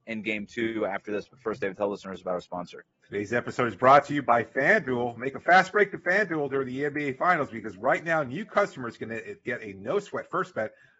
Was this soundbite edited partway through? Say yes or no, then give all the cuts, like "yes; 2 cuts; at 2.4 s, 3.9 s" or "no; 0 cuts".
yes; 1 cut; at 2.9 s